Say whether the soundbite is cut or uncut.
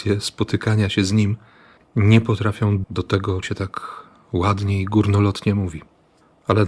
cut